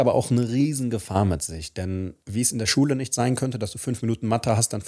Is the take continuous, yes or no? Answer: no